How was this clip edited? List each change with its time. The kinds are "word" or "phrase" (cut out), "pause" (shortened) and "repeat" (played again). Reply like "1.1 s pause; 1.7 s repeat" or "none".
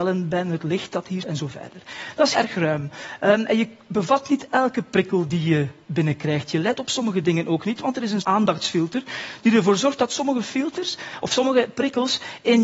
1.2 s word; 2.3 s word; 8.2 s phrase

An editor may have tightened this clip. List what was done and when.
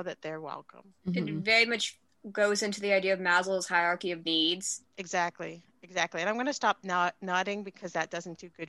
1.0 s pause; 4.9 s pause

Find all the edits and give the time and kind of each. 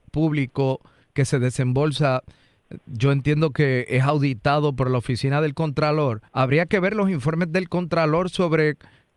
6.3 s pause

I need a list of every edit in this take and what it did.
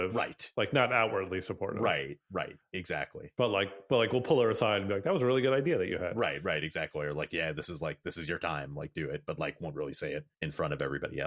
10.3 s pause

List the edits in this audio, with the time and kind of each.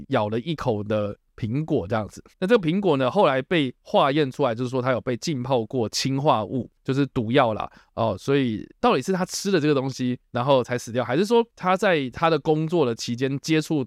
2.3 s pause; 6.8 s pause; 8.8 s word

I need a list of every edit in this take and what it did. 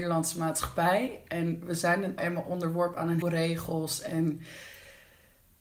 2.2 s word; 3.2 s word

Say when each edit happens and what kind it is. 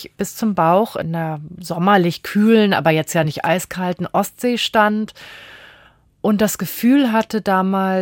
none

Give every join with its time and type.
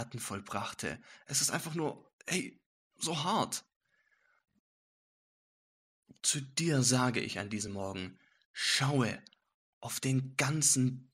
none

